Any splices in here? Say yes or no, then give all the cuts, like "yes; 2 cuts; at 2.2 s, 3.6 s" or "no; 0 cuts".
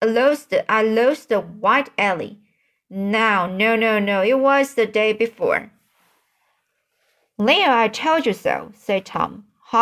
no; 0 cuts